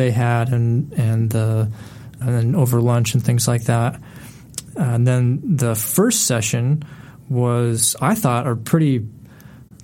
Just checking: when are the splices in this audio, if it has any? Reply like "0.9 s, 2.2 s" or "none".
2.2 s